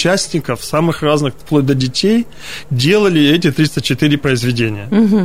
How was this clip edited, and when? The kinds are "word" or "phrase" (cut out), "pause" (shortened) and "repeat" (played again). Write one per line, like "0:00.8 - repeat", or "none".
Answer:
none